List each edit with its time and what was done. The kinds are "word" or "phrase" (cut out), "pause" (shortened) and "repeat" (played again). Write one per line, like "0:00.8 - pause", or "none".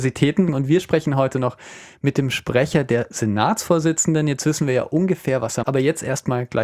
0:05.6 - word